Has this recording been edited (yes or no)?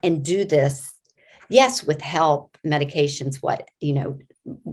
no